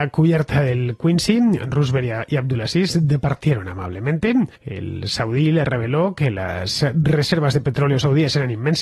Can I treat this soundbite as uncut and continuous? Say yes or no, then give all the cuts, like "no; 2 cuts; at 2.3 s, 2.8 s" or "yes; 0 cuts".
no; 1 cut; at 4.6 s